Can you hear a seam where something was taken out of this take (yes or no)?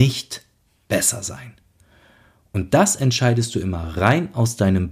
no